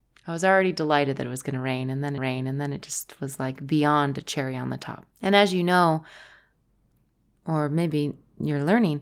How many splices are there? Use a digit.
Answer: 2